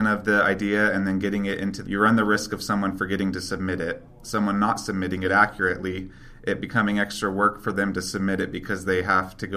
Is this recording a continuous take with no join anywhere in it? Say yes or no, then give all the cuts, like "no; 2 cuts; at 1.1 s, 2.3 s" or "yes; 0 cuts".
no; 1 cut; at 1.8 s